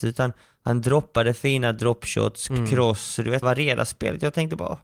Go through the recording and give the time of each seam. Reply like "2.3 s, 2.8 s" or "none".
2.5 s, 3.4 s